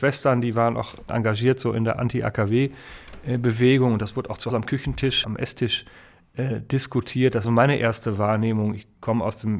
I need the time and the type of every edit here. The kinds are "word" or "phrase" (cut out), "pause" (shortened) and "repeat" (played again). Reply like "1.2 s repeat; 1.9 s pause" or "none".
1.1 s word; 4.5 s word; 5.2 s word; 7.4 s word